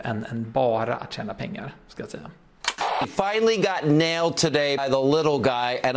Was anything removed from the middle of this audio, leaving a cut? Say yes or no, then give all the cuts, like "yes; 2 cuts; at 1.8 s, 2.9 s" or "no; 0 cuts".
yes; 1 cut; at 4.8 s